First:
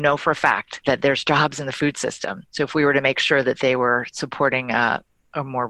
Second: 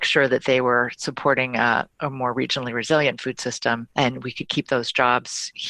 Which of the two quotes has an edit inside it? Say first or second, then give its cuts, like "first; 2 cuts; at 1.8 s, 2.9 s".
second; 1 cut; at 1.9 s